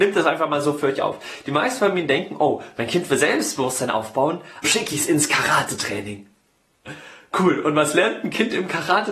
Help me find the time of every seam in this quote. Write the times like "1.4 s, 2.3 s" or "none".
4.6 s